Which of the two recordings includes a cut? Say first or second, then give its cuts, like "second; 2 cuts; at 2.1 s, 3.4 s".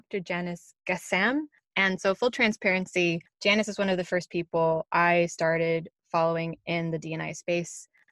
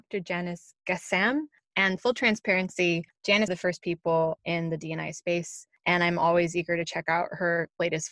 second; 4 cuts; at 2.0 s, 3.5 s, 4.4 s, 5.8 s